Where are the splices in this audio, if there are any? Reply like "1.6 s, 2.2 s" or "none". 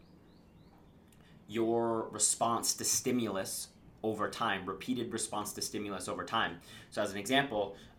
none